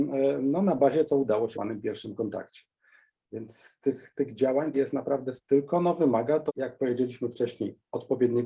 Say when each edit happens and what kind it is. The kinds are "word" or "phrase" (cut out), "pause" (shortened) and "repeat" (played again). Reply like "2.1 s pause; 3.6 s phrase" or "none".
1.0 s word; 1.5 s phrase; 4.1 s word; 4.7 s word; 5.4 s word; 6.5 s word